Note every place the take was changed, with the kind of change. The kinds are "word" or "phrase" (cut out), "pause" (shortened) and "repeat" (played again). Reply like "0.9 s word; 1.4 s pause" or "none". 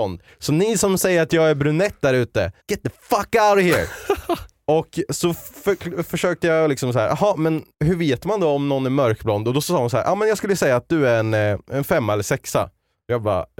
2.6 s pause; 7.7 s pause